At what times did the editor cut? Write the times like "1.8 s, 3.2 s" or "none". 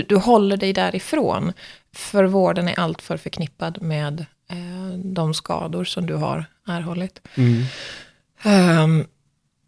none